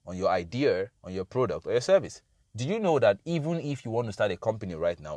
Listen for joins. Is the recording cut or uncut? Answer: cut